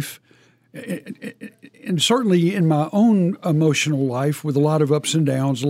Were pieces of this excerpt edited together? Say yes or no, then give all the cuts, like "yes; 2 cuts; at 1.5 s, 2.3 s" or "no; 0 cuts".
yes; 1 cut; at 1.7 s